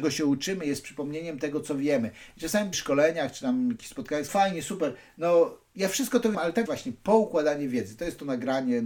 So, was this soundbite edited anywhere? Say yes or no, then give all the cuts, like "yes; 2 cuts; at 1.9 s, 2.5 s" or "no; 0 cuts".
yes; 5 cuts; at 2.7 s, 4.3 s, 5.7 s, 6.3 s, 6.7 s